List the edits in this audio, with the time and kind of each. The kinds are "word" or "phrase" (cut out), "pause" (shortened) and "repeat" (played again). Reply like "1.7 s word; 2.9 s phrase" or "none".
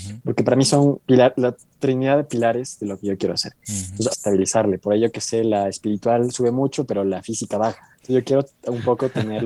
1.0 s pause; 4.1 s phrase; 8.0 s word